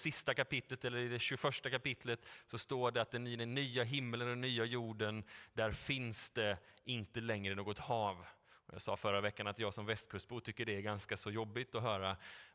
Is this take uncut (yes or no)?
yes